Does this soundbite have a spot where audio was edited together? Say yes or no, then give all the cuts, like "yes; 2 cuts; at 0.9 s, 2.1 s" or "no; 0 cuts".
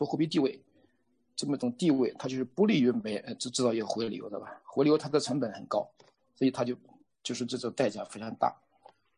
no; 0 cuts